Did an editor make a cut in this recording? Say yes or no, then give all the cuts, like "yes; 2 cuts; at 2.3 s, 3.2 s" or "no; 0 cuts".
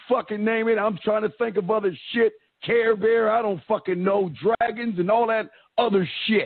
no; 0 cuts